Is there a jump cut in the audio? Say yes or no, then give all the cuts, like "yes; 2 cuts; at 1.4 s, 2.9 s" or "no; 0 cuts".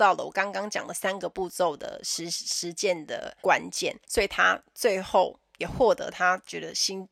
yes; 2 cuts; at 3.4 s, 4.0 s